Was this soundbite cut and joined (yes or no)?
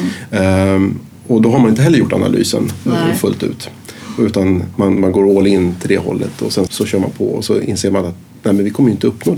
yes